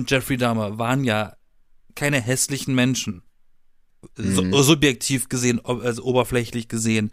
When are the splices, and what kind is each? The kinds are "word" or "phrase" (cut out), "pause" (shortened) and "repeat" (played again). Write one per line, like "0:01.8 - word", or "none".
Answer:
none